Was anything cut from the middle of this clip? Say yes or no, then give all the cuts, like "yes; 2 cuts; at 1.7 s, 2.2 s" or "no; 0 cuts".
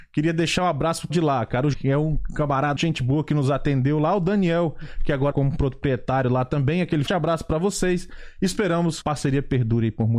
yes; 6 cuts; at 1.1 s, 1.7 s, 2.8 s, 5.3 s, 7.1 s, 9.0 s